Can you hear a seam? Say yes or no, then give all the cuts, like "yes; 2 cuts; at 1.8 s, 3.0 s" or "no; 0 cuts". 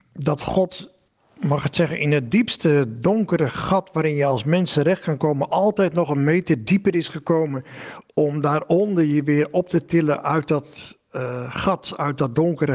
no; 0 cuts